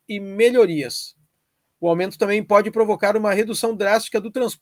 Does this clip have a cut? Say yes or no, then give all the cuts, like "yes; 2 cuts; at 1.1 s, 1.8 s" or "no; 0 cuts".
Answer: no; 0 cuts